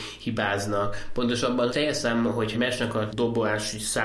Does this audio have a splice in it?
yes; 3 cuts; at 1.7 s, 2.5 s, 3.1 s

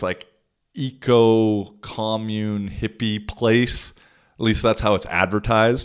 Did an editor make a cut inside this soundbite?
no; 0 cuts

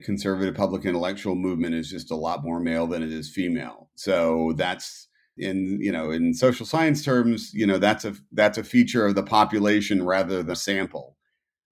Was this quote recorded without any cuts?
no; 2 cuts; at 5.4 s, 10.5 s

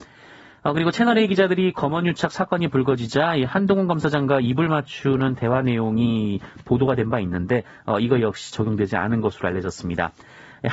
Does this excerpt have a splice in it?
no; 0 cuts

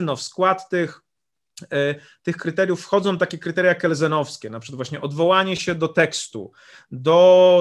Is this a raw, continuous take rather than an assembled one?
yes; 0 cuts

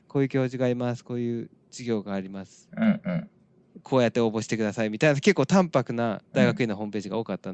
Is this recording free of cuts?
no; 1 cut; at 6.2 s

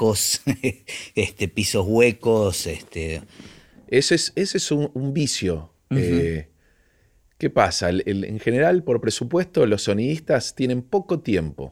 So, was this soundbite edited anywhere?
no; 0 cuts

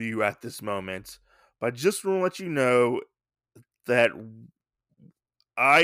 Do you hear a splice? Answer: no; 0 cuts

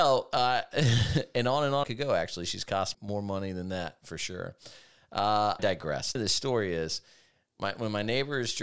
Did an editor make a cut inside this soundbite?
yes; 4 cuts; at 1.8 s, 2.9 s, 5.6 s, 6.1 s

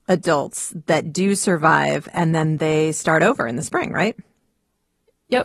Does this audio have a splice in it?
no; 0 cuts

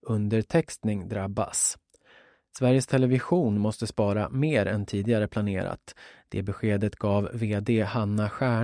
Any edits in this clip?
no; 0 cuts

